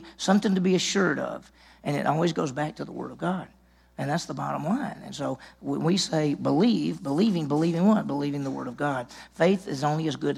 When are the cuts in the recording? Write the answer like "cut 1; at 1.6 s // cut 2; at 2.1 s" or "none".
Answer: none

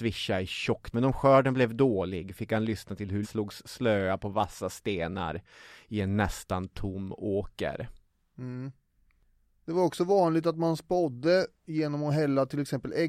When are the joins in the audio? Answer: cut 1; at 0.9 s // cut 2; at 3.2 s

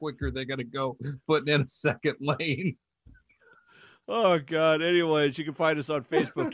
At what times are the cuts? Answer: none

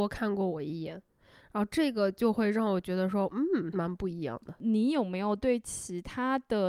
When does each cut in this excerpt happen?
none

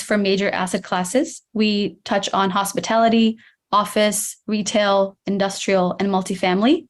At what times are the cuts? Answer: none

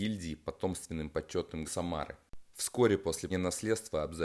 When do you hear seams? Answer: cut 1; at 1.6 s // cut 2; at 2.5 s // cut 3; at 3.3 s

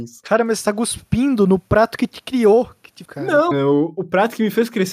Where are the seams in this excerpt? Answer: cut 1; at 3.0 s // cut 2; at 3.5 s

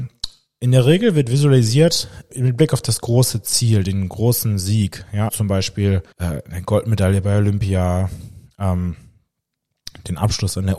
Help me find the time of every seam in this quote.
cut 1; at 2.3 s // cut 2; at 5.3 s // cut 3; at 6.1 s

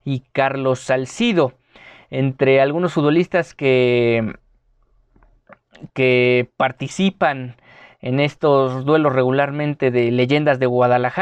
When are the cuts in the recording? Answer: none

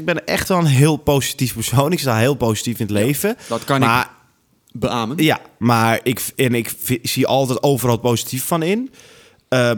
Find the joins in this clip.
none

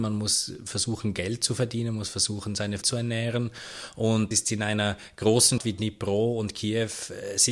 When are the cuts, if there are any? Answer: cut 1; at 2.8 s // cut 2; at 4.3 s // cut 3; at 5.6 s

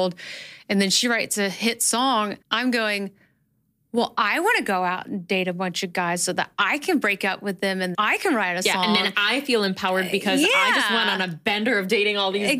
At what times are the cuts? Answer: cut 1; at 2.4 s // cut 2; at 7.9 s

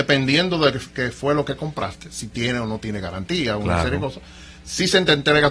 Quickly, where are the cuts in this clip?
none

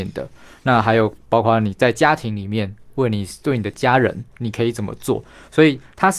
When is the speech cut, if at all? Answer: none

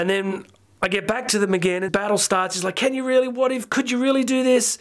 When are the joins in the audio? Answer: cut 1; at 1.9 s

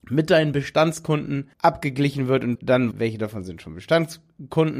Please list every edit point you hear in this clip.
cut 1; at 1.5 s // cut 2; at 2.6 s // cut 3; at 2.9 s

